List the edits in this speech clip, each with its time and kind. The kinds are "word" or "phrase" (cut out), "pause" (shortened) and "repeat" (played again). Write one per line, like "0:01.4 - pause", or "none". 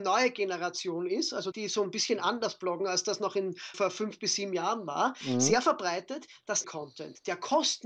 0:01.5 - word
0:03.7 - word
0:06.6 - phrase